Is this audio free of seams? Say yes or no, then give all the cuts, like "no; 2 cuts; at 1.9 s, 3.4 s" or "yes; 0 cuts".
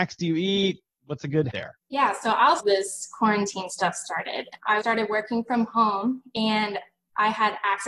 no; 4 cuts; at 1.5 s, 1.8 s, 2.6 s, 4.8 s